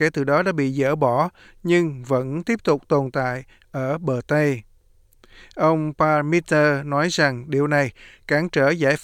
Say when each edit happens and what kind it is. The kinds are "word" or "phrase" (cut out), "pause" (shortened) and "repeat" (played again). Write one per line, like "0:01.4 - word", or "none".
none